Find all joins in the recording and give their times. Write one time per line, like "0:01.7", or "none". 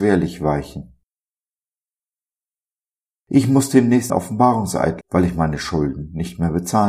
0:04.1
0:05.0